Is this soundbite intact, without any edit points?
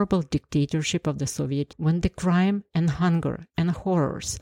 no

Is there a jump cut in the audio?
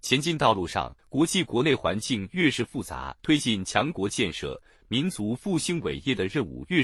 yes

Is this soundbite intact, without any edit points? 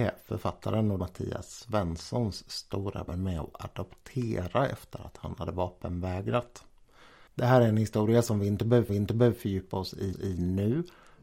no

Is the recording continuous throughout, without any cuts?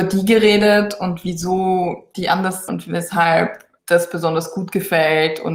no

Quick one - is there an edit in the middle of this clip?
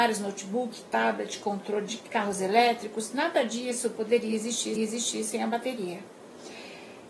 yes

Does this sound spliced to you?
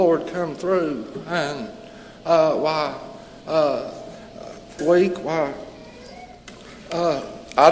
yes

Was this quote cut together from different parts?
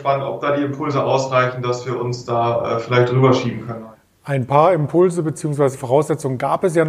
no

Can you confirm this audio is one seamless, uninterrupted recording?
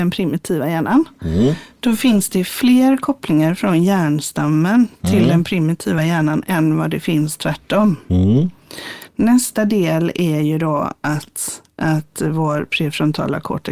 yes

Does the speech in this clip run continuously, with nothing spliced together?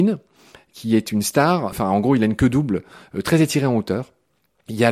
yes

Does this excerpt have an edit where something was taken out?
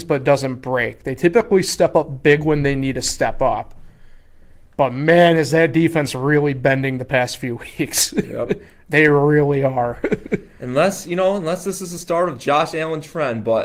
no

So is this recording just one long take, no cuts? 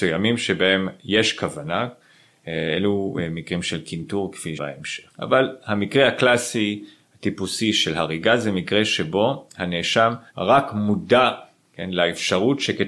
no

